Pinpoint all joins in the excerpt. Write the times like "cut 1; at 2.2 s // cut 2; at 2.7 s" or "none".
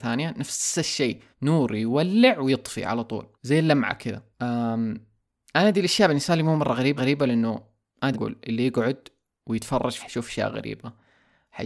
cut 1; at 1.3 s // cut 2; at 3.3 s // cut 3; at 4.3 s // cut 4; at 7.0 s // cut 5; at 8.1 s // cut 6; at 10.0 s